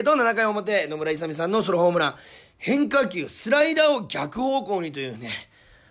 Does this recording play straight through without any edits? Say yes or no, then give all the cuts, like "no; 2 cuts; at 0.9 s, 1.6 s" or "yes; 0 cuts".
yes; 0 cuts